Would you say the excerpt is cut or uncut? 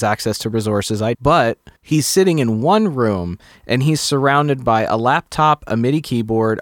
cut